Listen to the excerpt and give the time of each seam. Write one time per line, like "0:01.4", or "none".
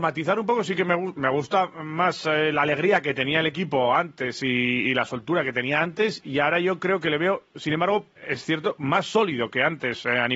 0:08.2